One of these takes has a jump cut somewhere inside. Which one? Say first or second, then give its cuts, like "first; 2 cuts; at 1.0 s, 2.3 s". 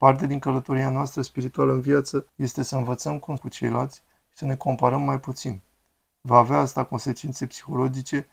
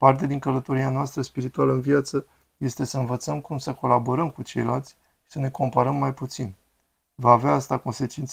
first; 2 cuts; at 2.3 s, 3.4 s